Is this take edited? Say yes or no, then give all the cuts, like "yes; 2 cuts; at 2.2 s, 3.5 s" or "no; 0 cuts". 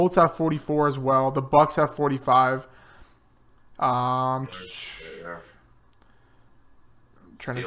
no; 0 cuts